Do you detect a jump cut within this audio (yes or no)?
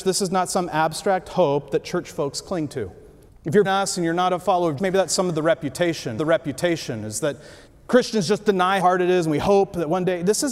yes